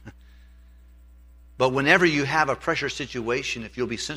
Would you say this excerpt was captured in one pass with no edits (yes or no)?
yes